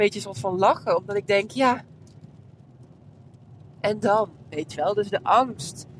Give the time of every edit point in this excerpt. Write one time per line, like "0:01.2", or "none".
none